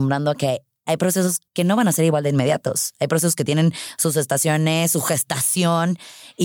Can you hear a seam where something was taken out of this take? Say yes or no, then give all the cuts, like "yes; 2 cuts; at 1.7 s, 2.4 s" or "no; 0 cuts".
yes; 1 cut; at 1.5 s